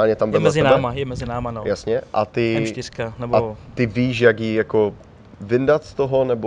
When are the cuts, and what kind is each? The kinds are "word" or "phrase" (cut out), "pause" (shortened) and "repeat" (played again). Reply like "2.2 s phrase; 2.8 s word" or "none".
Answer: none

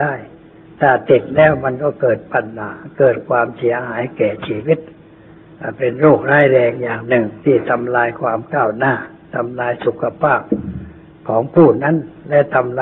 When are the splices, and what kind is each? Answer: 7.4 s pause

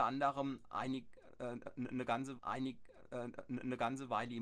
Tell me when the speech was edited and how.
2.4 s repeat

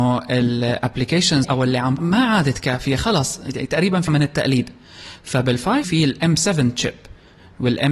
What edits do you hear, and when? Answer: 1.4 s phrase; 2.0 s word; 4.1 s word; 5.8 s word

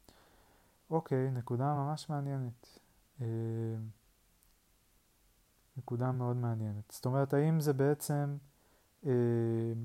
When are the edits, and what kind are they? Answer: none

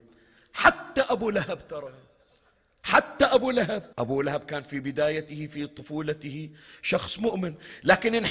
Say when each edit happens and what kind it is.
3.9 s pause

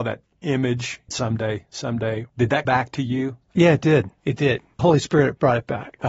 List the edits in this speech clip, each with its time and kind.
1.1 s phrase; 2.3 s pause; 2.7 s word; 3.4 s pause; 4.2 s pause; 4.8 s word

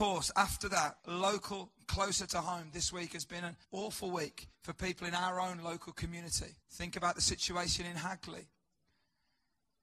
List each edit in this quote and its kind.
1.0 s pause; 3.6 s pause; 4.5 s pause; 6.6 s pause

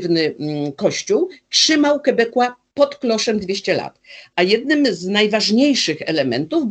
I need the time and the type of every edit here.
none

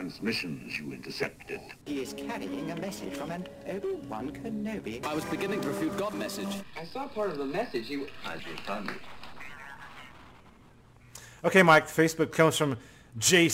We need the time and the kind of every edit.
5.6 s phrase; 6.1 s word; 8.4 s word; 12.3 s word

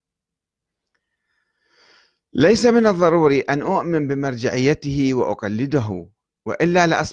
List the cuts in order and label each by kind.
none

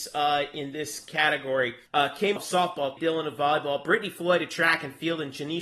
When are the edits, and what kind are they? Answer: 1.9 s pause; 2.4 s word; 3.0 s word

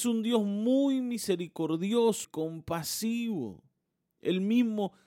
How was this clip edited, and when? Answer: 2.2 s word

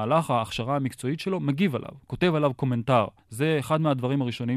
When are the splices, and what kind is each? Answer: 3.2 s pause

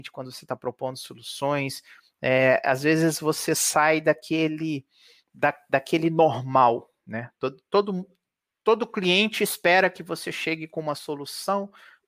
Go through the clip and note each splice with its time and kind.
none

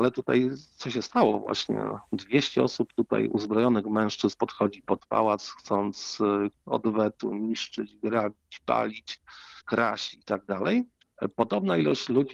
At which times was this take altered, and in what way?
none

